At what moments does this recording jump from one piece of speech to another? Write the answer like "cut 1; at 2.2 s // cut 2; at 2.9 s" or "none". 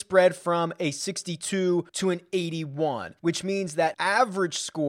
cut 1; at 1.9 s // cut 2; at 3.2 s // cut 3; at 3.9 s